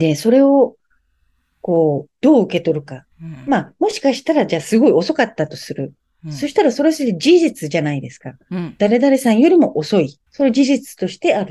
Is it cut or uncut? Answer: cut